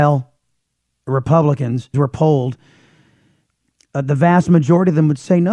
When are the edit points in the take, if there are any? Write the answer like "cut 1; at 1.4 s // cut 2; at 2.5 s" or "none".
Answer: cut 1; at 1.9 s